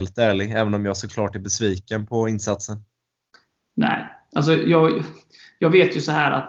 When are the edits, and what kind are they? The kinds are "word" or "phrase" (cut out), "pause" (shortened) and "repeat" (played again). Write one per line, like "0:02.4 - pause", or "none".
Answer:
none